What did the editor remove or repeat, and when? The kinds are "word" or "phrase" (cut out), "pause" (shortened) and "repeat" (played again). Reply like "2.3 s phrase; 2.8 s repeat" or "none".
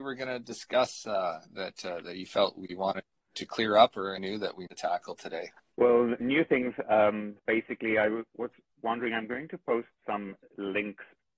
1.4 s pause; 3.3 s word; 4.2 s word; 4.7 s phrase; 5.6 s pause; 7.4 s pause; 8.7 s pause; 10.0 s pause